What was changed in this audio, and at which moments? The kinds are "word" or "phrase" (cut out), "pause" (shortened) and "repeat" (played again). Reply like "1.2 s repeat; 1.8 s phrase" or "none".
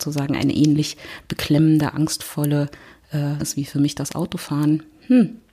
3.4 s word